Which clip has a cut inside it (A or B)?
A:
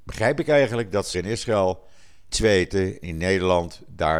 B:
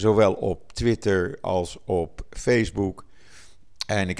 A